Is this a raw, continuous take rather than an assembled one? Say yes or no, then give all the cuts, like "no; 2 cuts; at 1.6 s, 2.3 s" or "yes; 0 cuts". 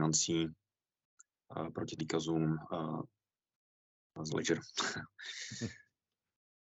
no; 2 cuts; at 2.0 s, 4.3 s